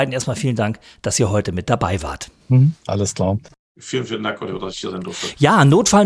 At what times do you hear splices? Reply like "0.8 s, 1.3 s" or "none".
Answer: none